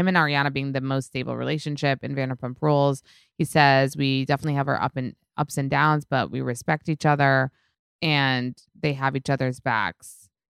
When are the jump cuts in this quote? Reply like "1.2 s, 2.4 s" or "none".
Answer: none